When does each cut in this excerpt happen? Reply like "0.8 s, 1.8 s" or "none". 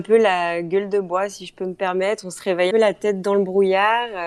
2.7 s